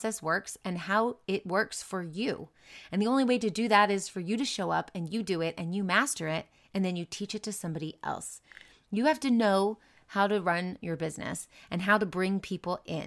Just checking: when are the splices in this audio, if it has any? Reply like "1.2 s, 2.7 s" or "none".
none